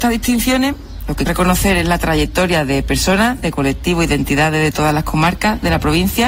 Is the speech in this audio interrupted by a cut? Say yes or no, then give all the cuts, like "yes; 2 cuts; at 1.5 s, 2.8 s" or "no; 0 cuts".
yes; 1 cut; at 1.3 s